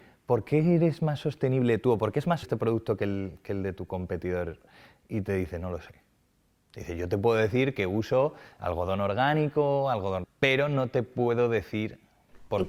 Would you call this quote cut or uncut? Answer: cut